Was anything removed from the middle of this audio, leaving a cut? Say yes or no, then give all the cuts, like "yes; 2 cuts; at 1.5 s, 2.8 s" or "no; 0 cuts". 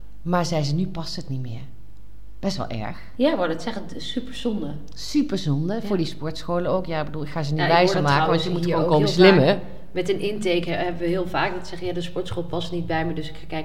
no; 0 cuts